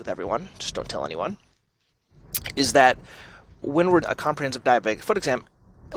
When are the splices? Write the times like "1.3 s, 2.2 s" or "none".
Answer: 3.6 s, 4.0 s